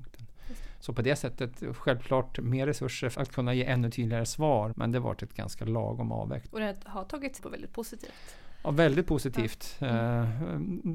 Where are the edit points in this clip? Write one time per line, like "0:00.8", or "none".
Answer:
0:03.1
0:04.7
0:06.5
0:07.4

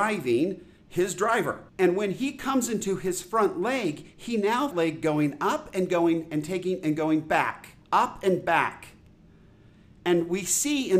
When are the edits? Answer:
0:01.7
0:04.7
0:07.8

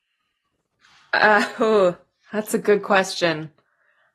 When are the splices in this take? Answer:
none

